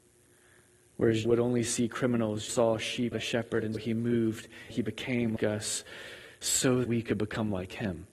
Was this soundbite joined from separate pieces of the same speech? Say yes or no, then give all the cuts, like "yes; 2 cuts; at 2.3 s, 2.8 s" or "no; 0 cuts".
yes; 7 cuts; at 1.2 s, 2.5 s, 3.1 s, 3.7 s, 4.7 s, 5.4 s, 6.8 s